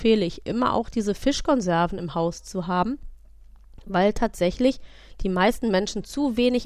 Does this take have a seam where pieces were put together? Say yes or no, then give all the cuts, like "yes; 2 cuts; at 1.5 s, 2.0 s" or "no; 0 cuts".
no; 0 cuts